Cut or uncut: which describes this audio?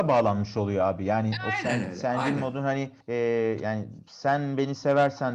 cut